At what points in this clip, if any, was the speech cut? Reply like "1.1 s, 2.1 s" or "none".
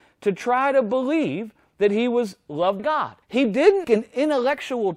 2.8 s, 3.2 s, 3.8 s